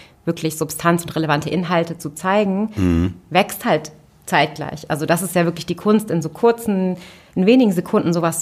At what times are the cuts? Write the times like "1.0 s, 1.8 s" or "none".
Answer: none

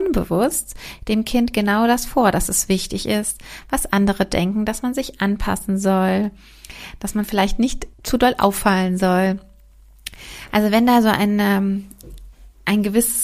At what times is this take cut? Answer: 7.9 s

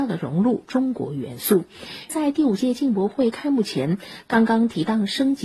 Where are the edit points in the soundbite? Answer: 2.1 s

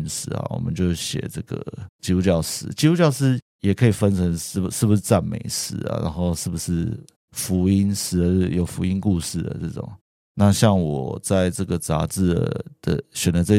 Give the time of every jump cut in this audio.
none

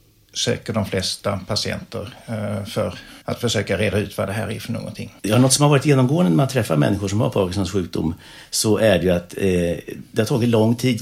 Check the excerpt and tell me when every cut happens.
3.2 s, 5.2 s

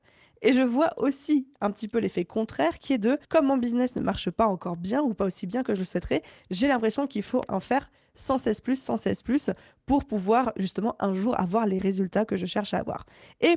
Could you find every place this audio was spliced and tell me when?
3.2 s

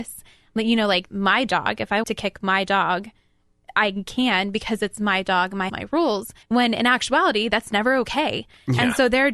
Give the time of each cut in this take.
1.1 s, 2.0 s, 5.7 s, 6.4 s

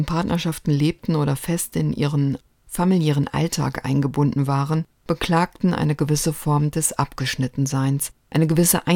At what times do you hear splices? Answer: none

